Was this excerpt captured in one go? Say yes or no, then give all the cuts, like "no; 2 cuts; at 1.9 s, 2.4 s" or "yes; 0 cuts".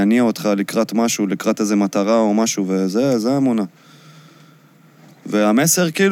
yes; 0 cuts